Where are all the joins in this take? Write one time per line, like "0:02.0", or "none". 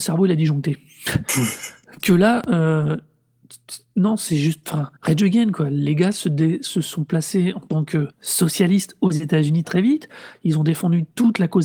0:02.0
0:05.0
0:08.1
0:09.6